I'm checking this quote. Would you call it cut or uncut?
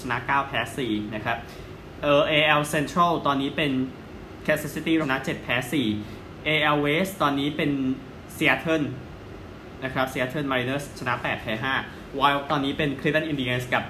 cut